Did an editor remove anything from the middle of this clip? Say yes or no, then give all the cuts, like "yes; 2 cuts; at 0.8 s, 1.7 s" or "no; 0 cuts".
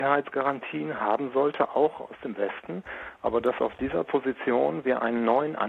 no; 0 cuts